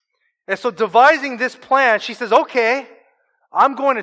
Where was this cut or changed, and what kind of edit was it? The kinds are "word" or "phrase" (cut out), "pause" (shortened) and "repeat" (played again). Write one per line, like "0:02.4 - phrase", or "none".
none